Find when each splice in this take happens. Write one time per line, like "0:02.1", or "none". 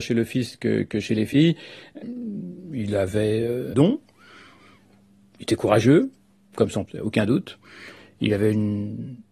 0:03.7
0:06.9